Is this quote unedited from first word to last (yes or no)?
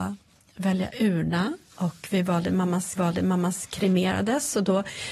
no